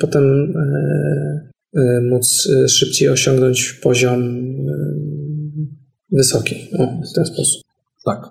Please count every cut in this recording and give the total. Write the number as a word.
zero